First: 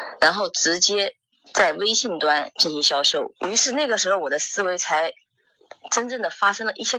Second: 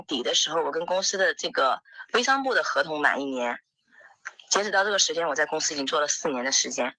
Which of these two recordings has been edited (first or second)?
first